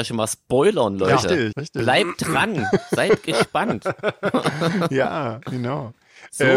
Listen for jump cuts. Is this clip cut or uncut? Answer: cut